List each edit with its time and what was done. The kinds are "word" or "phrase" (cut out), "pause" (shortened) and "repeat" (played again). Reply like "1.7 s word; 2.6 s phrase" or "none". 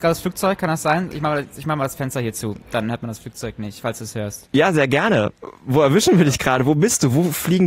none